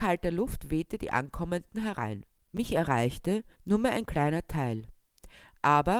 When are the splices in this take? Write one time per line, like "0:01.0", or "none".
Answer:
0:02.3
0:03.5